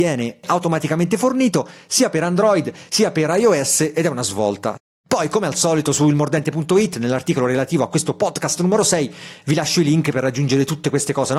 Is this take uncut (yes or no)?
no